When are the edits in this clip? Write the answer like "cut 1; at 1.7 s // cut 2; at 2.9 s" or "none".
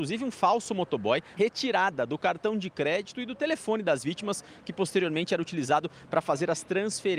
cut 1; at 1.4 s